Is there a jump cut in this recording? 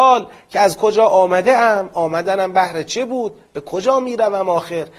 no; 0 cuts

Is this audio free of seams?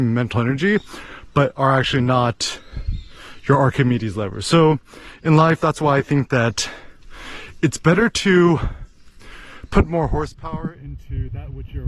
yes; 0 cuts

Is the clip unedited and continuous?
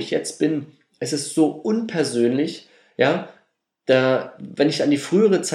yes; 0 cuts

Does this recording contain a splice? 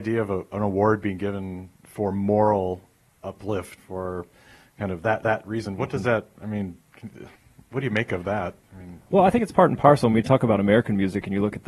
yes; 4 cuts; at 1.7 s, 3.8 s, 5.2 s, 7.4 s

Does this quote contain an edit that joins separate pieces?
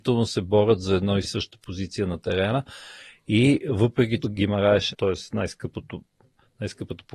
yes; 3 cuts; at 1.2 s, 4.2 s, 4.9 s

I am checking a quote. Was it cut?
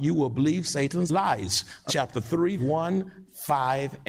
yes; 2 cuts; at 1.9 s, 2.6 s

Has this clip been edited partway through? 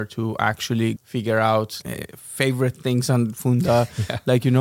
yes; 2 cuts; at 1.0 s, 1.8 s

